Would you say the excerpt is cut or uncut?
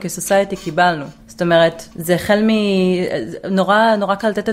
cut